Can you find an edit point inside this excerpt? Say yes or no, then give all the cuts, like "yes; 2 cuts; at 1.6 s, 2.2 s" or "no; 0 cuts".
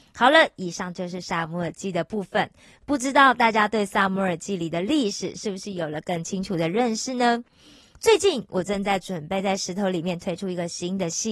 no; 0 cuts